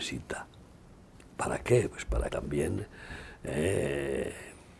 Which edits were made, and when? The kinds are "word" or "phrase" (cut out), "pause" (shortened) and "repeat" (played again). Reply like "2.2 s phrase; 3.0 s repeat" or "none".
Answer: 2.3 s word